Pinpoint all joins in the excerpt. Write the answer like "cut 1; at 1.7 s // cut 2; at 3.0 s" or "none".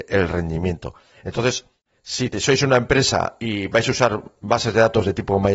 none